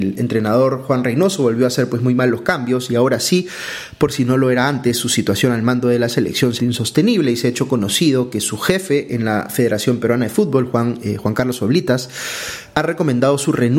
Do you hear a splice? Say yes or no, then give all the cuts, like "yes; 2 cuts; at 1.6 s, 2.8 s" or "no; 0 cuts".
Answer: yes; 1 cut; at 6.6 s